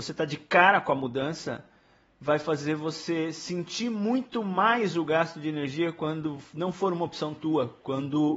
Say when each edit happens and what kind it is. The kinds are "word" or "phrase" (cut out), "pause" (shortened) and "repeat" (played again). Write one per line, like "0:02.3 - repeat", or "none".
none